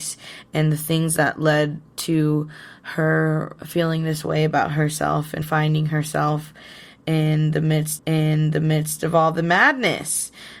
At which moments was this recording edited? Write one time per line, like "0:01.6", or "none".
0:03.6
0:05.4
0:08.0